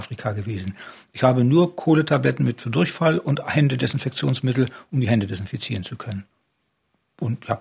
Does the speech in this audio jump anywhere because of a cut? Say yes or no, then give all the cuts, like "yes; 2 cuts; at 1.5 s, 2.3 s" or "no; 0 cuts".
no; 0 cuts